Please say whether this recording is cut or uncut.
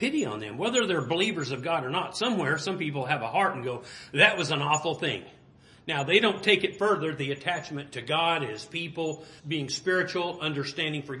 cut